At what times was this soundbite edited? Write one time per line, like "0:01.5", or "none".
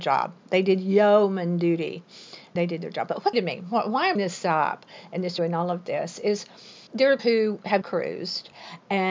0:02.6
0:03.3
0:04.2
0:05.4
0:06.9
0:07.2
0:07.8